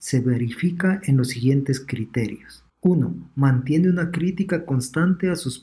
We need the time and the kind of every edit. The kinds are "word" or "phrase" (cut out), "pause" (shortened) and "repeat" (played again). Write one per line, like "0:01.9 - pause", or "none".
0:02.7 - pause